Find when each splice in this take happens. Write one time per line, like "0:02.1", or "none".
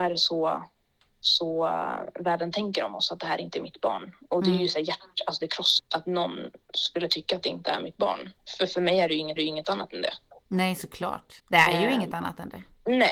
0:05.8
0:09.4
0:11.4

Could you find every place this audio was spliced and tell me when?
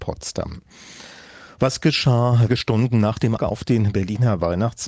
0:02.5
0:03.4

